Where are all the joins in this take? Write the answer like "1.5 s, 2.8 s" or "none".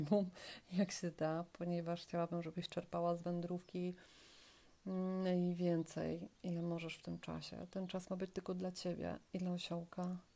6.3 s